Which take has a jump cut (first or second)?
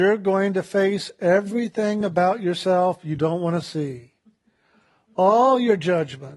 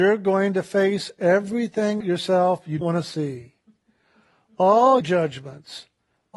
second